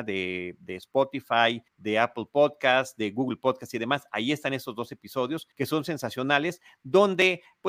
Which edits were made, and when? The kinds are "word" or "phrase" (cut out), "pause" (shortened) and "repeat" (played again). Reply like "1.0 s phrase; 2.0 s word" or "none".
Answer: 1.7 s pause; 5.5 s pause